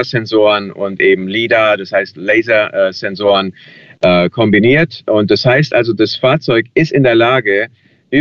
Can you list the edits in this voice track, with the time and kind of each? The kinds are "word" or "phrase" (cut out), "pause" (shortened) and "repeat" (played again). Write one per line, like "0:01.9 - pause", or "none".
none